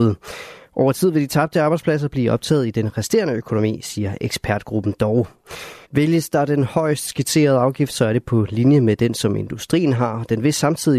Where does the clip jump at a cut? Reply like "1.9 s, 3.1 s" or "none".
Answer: 5.8 s